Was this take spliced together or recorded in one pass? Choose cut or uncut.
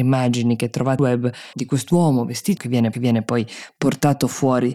cut